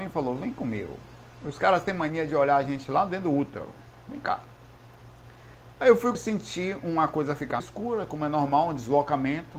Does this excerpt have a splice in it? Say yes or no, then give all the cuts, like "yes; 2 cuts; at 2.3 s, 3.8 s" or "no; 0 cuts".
yes; 2 cuts; at 6.1 s, 7.6 s